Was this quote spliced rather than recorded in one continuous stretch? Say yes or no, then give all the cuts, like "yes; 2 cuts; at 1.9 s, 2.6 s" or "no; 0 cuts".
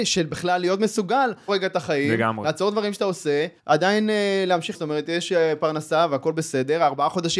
yes; 3 cuts; at 1.5 s, 3.6 s, 4.7 s